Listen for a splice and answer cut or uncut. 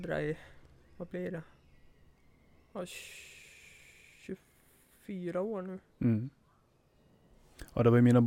uncut